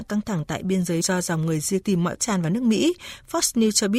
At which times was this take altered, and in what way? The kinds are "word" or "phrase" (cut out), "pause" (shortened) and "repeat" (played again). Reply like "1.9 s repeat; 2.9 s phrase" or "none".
1.0 s word; 1.8 s word; 2.2 s word